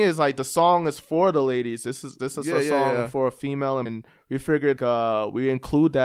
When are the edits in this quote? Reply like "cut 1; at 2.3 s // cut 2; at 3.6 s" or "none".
cut 1; at 3.9 s // cut 2; at 4.8 s